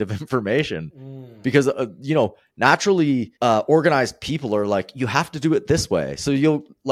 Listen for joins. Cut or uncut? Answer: cut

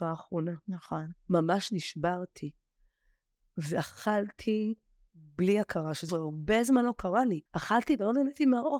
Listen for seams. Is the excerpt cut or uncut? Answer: cut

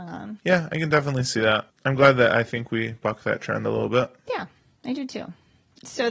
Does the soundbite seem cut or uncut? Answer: uncut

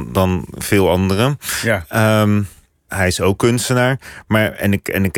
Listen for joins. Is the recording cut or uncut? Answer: cut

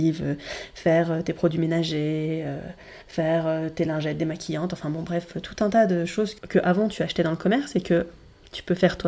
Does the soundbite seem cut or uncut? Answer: cut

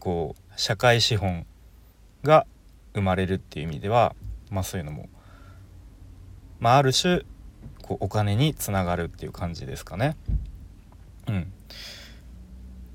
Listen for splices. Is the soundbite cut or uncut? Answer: uncut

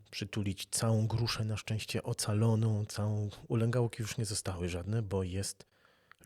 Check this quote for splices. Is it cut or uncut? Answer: uncut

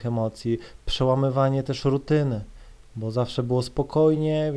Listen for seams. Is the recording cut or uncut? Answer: uncut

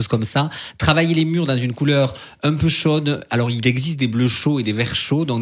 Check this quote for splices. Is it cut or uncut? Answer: uncut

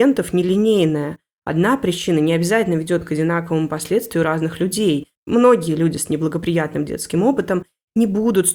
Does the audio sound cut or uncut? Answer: cut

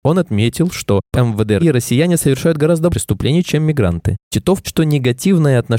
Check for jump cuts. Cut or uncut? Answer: cut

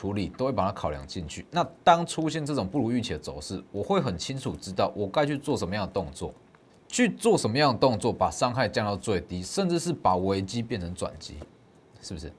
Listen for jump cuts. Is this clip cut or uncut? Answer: cut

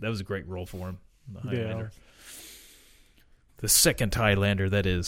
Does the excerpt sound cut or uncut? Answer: uncut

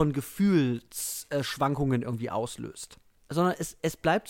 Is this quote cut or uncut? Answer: uncut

